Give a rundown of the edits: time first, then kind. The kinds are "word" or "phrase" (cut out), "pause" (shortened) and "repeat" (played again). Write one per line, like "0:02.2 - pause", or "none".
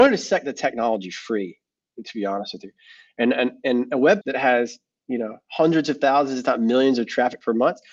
0:04.2 - word